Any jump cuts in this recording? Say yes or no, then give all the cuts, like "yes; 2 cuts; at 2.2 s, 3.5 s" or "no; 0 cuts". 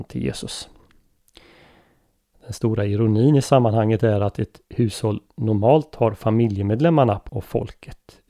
yes; 1 cut; at 7.3 s